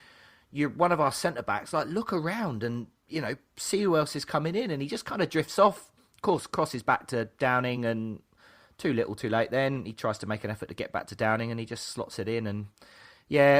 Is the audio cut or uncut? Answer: uncut